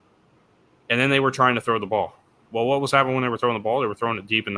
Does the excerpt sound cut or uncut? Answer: uncut